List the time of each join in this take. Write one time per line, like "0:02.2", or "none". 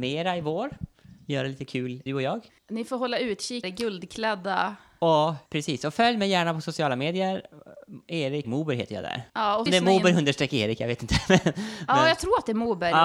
0:02.1
0:02.6
0:03.6
0:05.5
0:08.4
0:09.3
0:09.7